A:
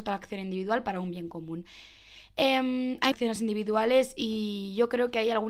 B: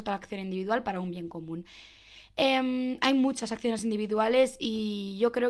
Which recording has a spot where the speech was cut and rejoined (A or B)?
A